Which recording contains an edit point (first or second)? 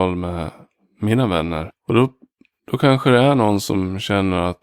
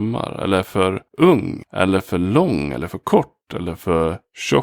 second